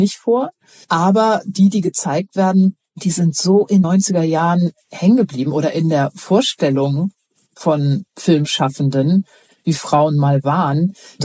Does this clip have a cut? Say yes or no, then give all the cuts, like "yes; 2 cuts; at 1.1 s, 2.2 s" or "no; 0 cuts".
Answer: yes; 1 cut; at 3.8 s